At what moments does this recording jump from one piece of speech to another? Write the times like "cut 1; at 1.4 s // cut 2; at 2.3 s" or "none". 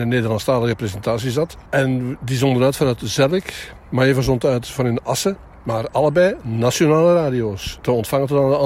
cut 1; at 1.7 s